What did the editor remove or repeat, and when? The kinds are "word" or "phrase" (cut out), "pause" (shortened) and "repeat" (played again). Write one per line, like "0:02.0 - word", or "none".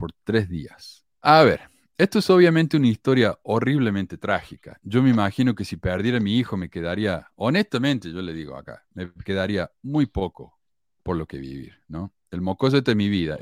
0:01.1 - pause